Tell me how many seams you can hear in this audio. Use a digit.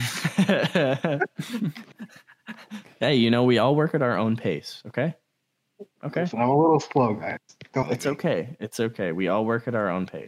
1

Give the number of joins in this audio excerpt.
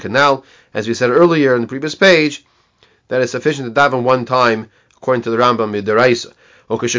0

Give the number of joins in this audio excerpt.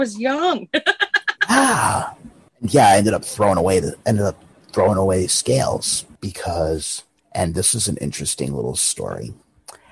0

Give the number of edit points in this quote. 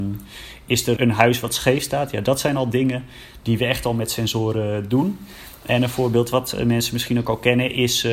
1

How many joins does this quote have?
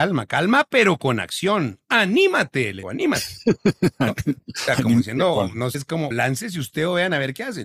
3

